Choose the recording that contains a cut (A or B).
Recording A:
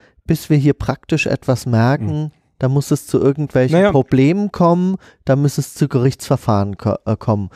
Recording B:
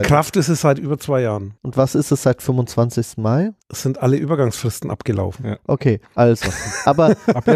B